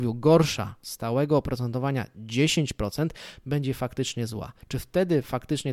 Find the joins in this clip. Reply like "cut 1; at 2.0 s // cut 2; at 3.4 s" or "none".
cut 1; at 4.6 s